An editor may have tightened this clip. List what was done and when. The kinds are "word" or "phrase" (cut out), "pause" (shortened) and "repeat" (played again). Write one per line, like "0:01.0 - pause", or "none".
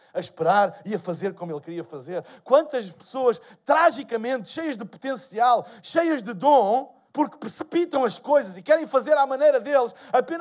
0:07.1 - pause